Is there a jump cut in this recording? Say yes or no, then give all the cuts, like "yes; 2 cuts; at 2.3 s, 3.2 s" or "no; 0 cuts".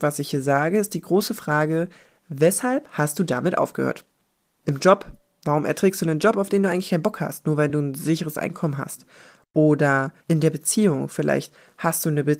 no; 0 cuts